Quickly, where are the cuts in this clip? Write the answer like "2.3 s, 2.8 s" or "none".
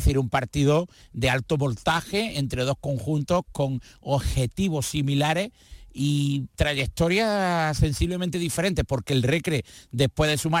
none